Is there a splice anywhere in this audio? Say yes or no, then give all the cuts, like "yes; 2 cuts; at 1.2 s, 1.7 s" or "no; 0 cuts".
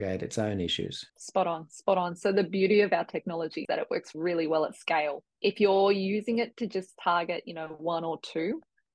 yes; 4 cuts; at 1.1 s, 3.6 s, 4.1 s, 5.3 s